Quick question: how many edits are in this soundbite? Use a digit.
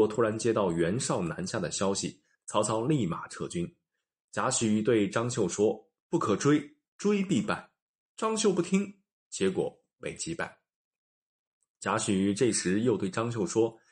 0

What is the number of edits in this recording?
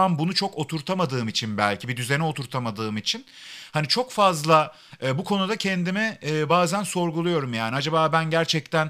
0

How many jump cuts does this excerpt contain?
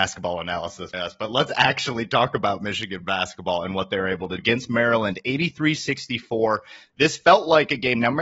2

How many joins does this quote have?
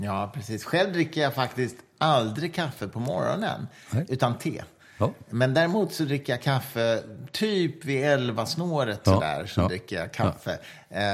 0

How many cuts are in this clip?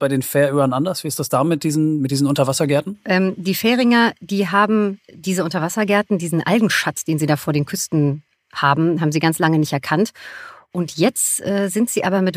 0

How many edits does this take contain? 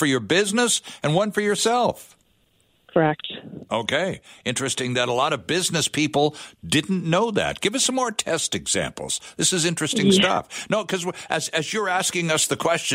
0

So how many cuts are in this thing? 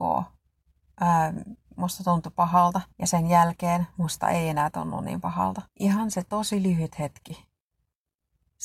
2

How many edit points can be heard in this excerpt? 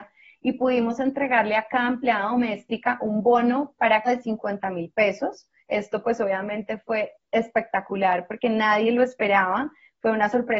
2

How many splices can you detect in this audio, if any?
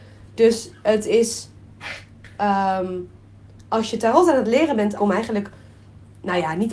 1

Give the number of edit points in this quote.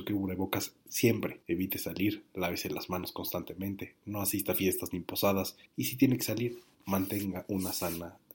2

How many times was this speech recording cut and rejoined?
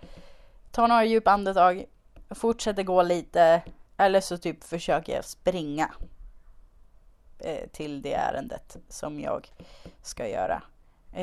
1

